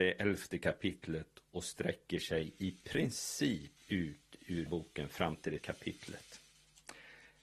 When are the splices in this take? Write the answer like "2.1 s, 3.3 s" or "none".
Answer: 3.8 s, 4.7 s, 5.6 s